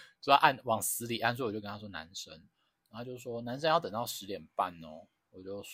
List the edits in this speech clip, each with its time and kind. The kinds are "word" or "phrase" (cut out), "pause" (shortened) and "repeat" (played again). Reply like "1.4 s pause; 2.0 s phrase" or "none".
none